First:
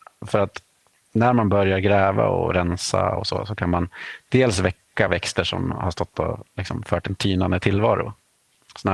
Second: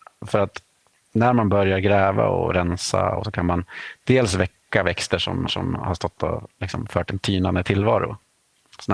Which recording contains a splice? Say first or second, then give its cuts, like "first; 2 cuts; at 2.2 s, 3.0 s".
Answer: second; 2 cuts; at 3.2 s, 5.5 s